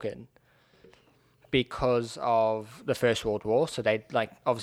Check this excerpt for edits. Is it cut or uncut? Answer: uncut